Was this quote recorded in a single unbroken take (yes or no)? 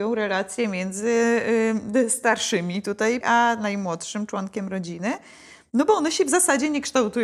no